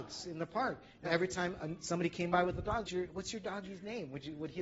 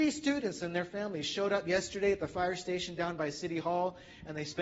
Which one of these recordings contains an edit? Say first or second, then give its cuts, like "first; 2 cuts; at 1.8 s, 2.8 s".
first; 2 cuts; at 1.0 s, 2.8 s